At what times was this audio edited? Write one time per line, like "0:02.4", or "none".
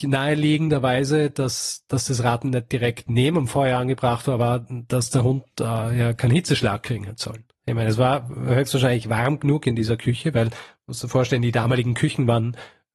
none